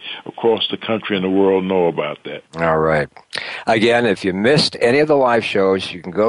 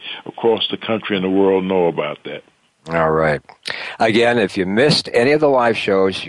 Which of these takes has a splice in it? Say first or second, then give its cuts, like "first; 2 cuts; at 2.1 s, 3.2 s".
first; 1 cut; at 2.5 s